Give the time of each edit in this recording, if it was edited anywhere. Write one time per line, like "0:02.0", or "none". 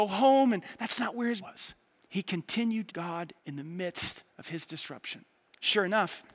0:01.4
0:02.0
0:02.9
0:03.4
0:04.3